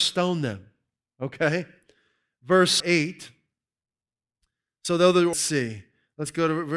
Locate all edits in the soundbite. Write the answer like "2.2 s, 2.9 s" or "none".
2.8 s, 5.3 s